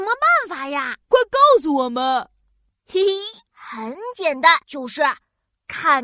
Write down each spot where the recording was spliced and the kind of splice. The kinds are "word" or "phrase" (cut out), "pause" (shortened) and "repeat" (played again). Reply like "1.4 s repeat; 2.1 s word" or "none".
1.0 s pause; 4.6 s pause